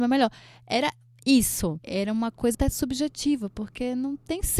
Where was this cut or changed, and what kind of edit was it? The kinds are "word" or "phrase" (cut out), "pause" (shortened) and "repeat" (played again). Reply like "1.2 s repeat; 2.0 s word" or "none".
2.5 s word

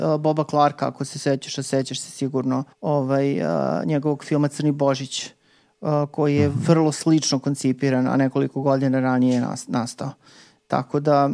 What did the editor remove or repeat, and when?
2.7 s pause

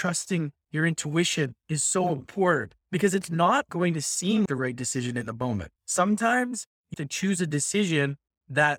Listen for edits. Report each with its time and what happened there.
1.6 s pause; 2.8 s pause; 3.7 s word; 4.5 s word; 5.8 s pause; 6.9 s word

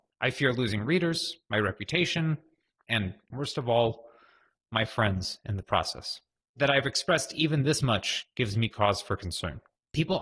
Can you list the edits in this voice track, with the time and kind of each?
none

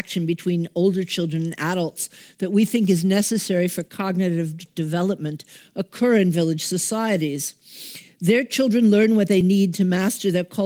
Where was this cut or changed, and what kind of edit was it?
none

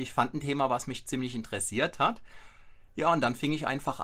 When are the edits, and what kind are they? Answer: none

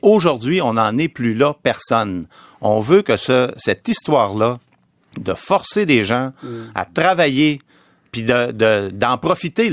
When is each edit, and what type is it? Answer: none

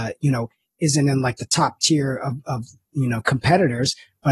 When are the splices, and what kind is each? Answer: none

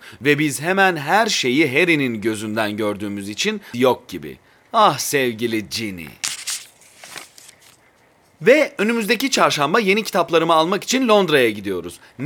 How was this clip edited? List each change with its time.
3.7 s phrase

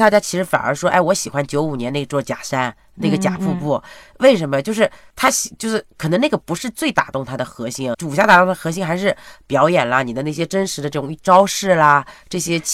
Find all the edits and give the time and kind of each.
5.1 s pause; 7.9 s word

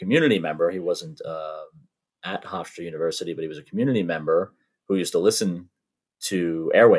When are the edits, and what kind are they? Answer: none

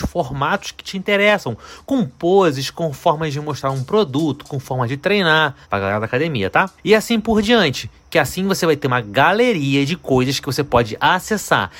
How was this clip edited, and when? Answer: 5.6 s pause; 6.8 s pause

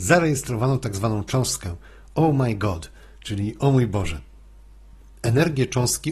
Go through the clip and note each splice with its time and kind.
none

